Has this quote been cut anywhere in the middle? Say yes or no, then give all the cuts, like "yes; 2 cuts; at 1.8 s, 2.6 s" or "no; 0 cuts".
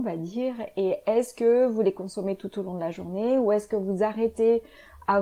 no; 0 cuts